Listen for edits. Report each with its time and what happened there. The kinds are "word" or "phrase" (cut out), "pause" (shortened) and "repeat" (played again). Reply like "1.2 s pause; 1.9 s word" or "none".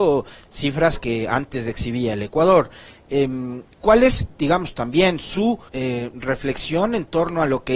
3.7 s pause; 5.7 s pause

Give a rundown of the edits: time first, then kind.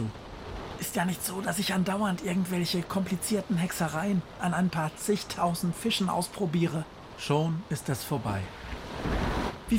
none

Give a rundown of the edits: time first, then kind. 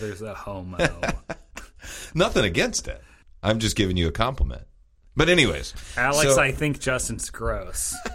none

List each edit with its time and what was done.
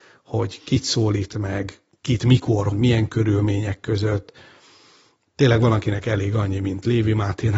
2.7 s word

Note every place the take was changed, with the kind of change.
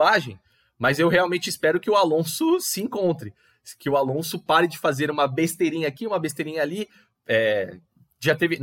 none

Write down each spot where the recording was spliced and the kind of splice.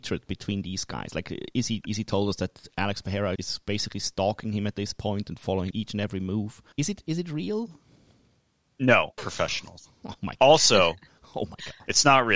3.3 s word; 5.7 s word; 6.7 s pause; 9.2 s phrase

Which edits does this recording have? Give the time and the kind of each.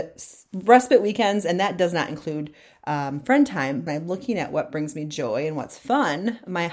3.9 s phrase

